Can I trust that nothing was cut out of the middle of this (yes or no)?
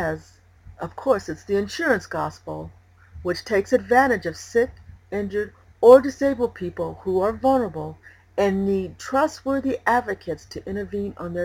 yes